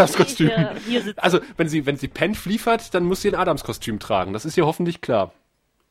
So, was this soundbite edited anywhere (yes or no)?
no